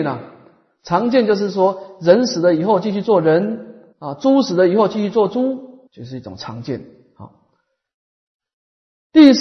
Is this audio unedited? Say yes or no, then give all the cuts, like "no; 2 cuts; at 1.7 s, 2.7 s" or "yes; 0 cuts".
no; 2 cuts; at 3.9 s, 5.9 s